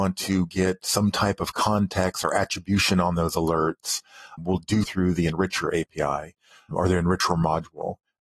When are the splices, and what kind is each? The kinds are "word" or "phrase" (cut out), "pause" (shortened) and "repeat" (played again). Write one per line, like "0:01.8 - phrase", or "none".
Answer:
0:04.4 - word
0:04.8 - word
0:06.7 - word